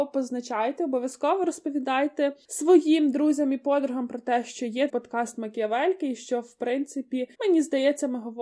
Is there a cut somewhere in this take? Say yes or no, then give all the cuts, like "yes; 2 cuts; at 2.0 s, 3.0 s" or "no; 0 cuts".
yes; 2 cuts; at 4.9 s, 7.3 s